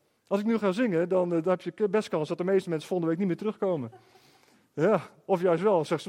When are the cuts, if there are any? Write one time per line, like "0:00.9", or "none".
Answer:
none